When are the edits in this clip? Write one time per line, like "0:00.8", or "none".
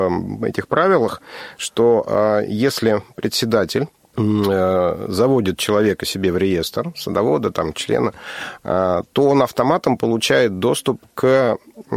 0:04.0